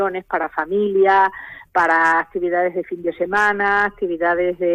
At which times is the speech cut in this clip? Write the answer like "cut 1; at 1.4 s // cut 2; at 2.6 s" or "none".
none